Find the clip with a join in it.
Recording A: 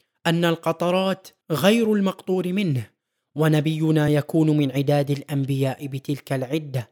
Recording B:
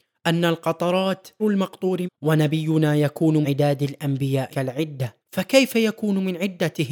B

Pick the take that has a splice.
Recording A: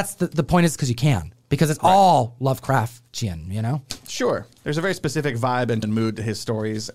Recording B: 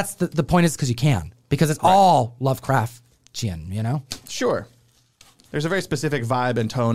A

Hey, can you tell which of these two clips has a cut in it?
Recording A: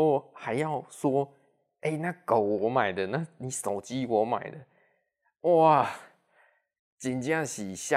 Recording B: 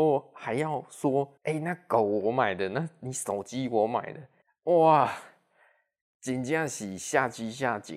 B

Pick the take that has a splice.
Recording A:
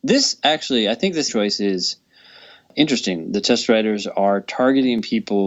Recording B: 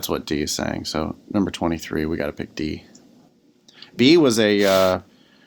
A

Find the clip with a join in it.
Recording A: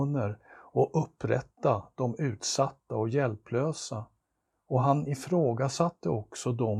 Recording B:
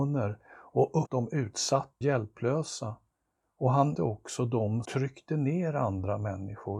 B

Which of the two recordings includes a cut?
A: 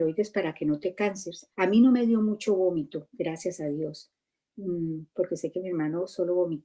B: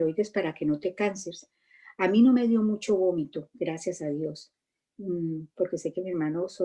A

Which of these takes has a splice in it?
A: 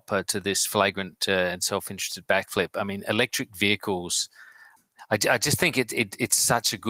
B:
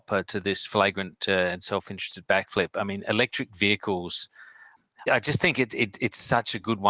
B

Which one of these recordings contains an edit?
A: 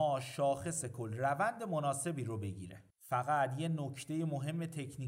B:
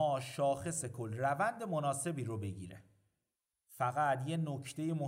A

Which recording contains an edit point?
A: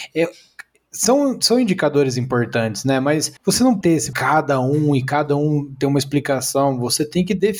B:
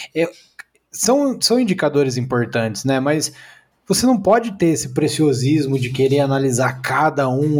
A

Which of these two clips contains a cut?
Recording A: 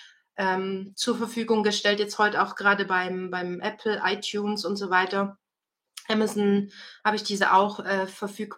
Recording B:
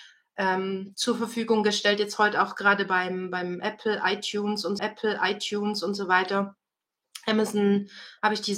B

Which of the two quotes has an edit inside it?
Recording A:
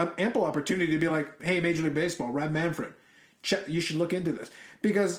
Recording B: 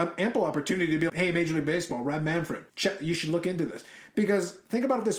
B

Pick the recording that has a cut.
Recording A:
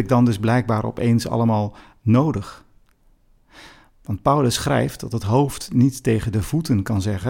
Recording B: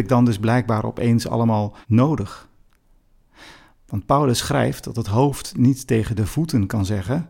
B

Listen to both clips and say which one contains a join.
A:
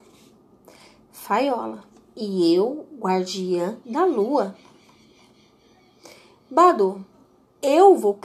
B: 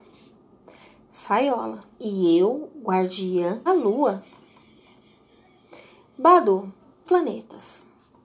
B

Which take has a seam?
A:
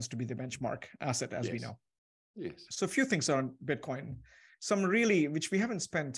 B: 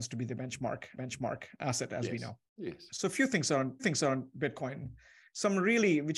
B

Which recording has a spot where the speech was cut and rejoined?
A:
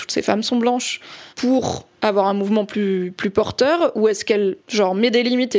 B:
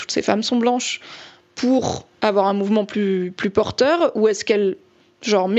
A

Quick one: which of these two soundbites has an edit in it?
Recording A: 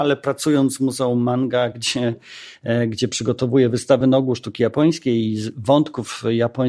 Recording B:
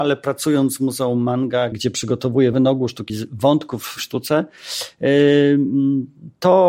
B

